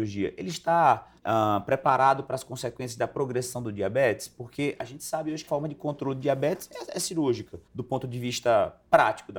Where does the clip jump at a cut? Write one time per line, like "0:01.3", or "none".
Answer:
0:01.2
0:05.5
0:07.7